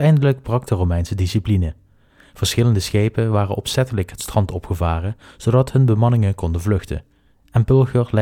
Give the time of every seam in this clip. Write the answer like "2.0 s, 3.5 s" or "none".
none